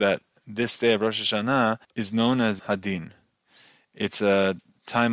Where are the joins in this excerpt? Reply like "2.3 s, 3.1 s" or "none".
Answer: 1.8 s, 2.6 s

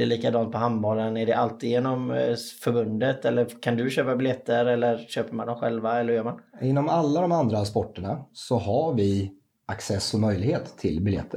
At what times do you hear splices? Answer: none

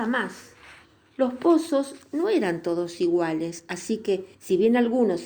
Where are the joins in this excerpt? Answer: 4.3 s

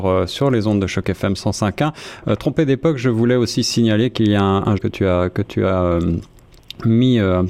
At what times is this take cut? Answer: 4.8 s

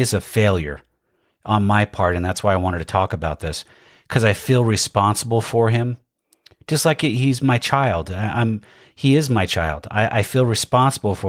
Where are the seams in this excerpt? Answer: none

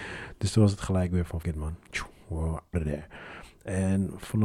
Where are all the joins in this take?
1.4 s, 2.7 s

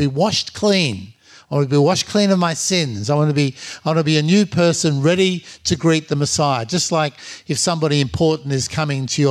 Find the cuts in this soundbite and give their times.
none

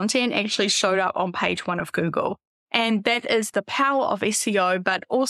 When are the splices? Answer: none

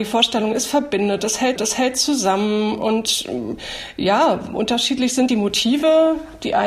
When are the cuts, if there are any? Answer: 1.6 s, 5.3 s

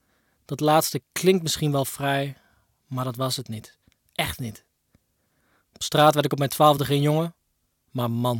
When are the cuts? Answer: none

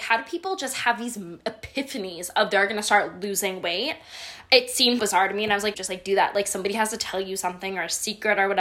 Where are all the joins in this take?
5.0 s, 5.7 s

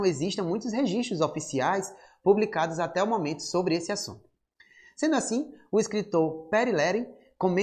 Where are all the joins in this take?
none

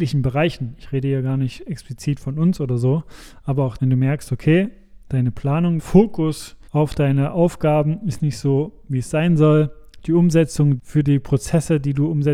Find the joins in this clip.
3.8 s, 5.8 s, 6.7 s, 10.8 s

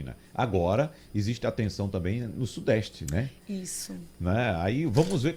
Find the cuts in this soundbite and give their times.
none

